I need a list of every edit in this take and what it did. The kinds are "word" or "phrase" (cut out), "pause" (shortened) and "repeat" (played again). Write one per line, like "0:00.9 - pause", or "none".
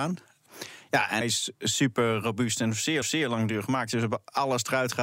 0:01.2 - word
0:03.0 - repeat